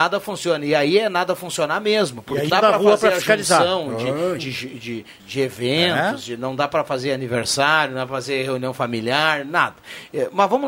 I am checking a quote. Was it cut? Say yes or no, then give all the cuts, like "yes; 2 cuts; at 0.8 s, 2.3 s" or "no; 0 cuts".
yes; 3 cuts; at 2.5 s, 4.4 s, 5.2 s